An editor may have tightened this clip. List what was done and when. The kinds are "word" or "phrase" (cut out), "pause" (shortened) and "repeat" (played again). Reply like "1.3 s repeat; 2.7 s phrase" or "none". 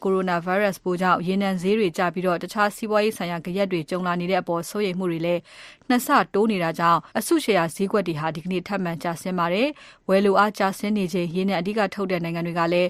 7.1 s pause